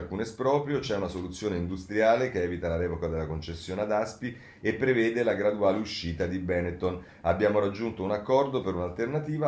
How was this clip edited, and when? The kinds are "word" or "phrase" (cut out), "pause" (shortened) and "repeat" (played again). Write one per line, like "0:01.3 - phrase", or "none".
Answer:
none